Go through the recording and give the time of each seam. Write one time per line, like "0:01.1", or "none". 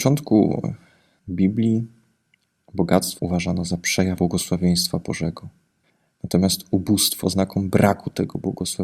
0:03.2
0:04.2
0:07.2